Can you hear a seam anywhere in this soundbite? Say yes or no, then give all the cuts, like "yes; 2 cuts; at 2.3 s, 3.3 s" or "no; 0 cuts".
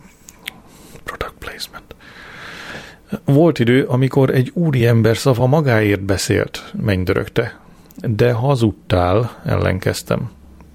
no; 0 cuts